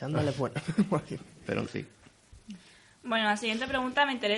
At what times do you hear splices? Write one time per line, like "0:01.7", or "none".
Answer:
0:01.7